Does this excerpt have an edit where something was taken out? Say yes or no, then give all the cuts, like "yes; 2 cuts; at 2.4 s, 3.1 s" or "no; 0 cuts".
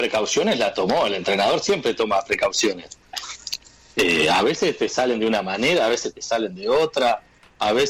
no; 0 cuts